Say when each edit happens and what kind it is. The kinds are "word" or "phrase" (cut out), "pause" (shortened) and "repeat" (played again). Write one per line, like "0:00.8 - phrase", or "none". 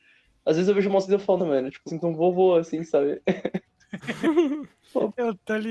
0:01.1 - word
0:01.4 - word
0:01.9 - word